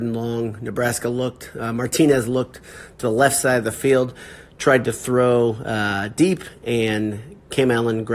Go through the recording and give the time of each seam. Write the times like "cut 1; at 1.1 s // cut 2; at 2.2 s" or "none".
none